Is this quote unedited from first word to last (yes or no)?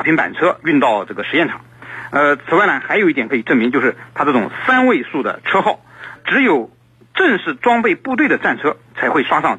no